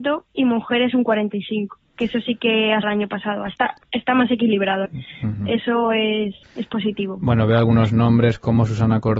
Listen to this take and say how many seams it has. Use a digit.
4